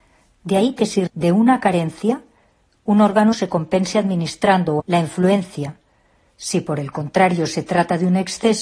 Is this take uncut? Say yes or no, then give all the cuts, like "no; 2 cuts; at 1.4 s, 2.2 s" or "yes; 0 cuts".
no; 3 cuts; at 1.1 s, 3.3 s, 4.8 s